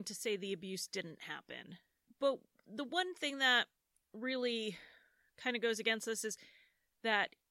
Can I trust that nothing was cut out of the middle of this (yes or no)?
yes